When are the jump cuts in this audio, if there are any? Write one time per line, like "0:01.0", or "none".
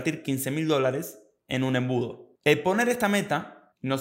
none